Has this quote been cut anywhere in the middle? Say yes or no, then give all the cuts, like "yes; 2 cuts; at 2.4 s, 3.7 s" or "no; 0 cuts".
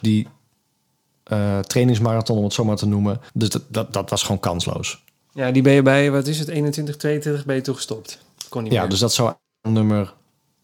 yes; 1 cut; at 3.3 s